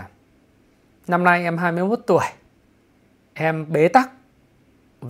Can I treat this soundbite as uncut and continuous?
yes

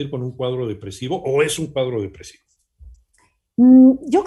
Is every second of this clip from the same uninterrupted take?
yes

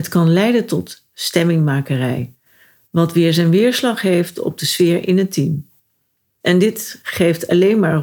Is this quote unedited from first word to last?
yes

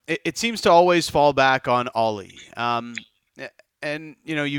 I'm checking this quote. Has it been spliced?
no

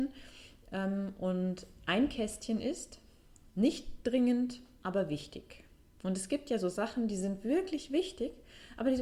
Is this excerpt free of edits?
yes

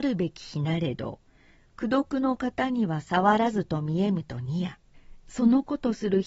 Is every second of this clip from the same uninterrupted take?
yes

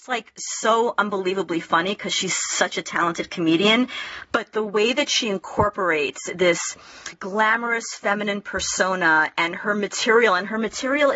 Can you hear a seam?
no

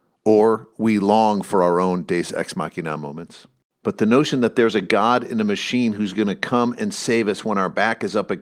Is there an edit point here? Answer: no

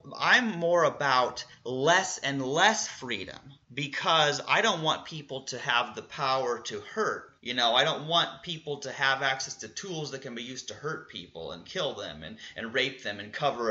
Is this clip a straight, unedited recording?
no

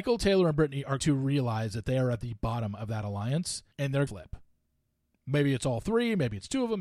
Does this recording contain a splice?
yes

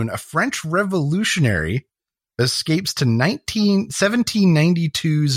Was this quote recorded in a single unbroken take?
yes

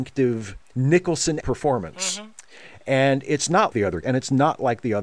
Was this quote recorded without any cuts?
no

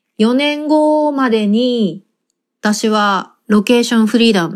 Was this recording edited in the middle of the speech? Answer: no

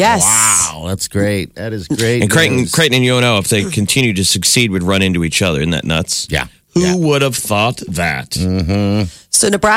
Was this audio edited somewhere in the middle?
no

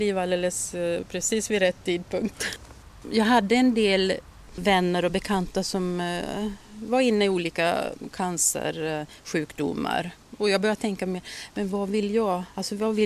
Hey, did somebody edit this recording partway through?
no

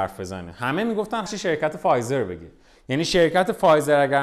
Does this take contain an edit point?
yes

